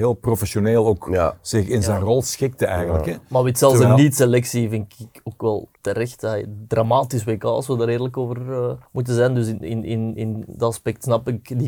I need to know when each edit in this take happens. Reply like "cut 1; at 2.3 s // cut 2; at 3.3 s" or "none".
cut 1; at 5.8 s // cut 2; at 8.9 s